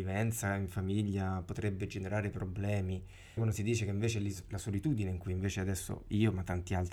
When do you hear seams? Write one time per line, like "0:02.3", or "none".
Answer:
0:03.4